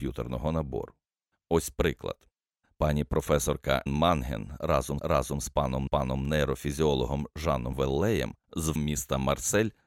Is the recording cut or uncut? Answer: cut